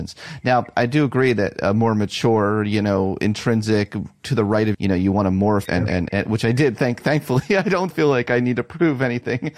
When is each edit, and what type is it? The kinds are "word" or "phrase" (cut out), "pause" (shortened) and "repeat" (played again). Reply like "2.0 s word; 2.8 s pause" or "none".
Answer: 4.7 s phrase; 5.7 s word; 6.1 s word; 7.9 s word